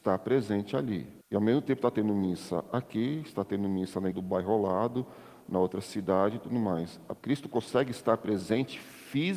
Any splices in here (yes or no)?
yes